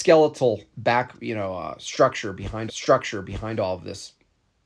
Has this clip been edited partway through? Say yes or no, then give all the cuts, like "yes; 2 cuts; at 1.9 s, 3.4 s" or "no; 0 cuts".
yes; 1 cut; at 2.7 s